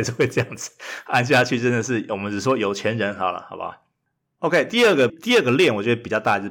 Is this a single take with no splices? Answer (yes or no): no